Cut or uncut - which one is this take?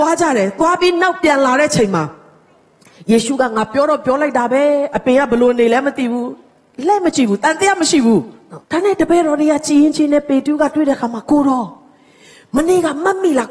cut